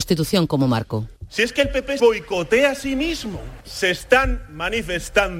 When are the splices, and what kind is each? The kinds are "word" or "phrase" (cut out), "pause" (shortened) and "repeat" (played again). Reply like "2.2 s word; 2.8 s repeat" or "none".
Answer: 1.2 s pause; 2.0 s word; 3.6 s pause